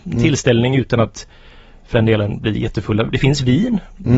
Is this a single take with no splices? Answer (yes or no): yes